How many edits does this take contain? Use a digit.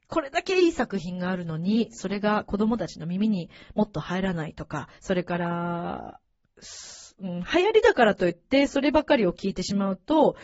1